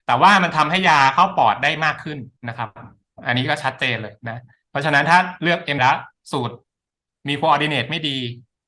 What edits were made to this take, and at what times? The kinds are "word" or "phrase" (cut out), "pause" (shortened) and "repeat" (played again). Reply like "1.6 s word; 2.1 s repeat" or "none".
2.4 s pause; 5.8 s word